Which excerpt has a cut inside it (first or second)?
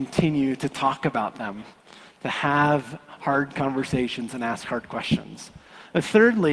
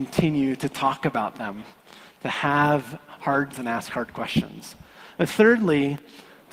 second